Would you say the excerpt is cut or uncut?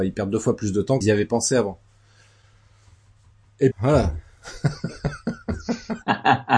cut